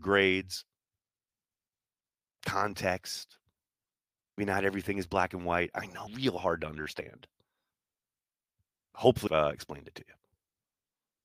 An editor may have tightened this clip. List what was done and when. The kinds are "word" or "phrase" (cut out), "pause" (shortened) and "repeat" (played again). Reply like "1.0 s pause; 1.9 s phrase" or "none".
4.4 s word; 6.1 s word; 9.3 s word